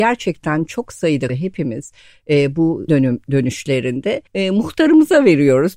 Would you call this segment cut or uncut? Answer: cut